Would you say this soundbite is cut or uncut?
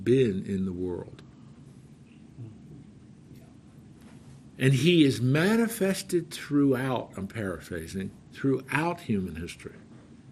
uncut